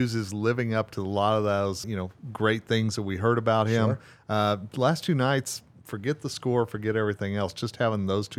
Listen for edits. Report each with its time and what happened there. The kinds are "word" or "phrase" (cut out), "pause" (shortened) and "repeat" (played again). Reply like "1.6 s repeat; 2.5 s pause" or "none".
1.8 s word